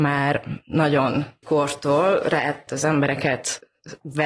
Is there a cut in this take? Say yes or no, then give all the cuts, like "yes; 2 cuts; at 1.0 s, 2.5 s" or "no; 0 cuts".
yes; 2 cuts; at 1.4 s, 2.7 s